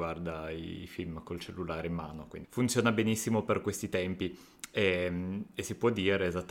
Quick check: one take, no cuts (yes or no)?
no